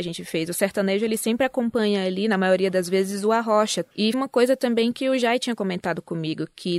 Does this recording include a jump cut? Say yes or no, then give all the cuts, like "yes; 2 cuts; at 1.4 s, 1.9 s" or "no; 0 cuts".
yes; 1 cut; at 4.1 s